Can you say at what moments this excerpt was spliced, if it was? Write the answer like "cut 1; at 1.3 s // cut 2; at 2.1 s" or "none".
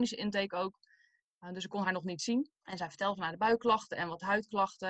cut 1; at 2.6 s